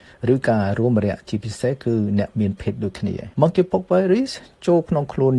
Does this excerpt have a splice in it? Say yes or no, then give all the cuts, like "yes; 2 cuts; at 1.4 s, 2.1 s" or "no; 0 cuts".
yes; 1 cut; at 3.3 s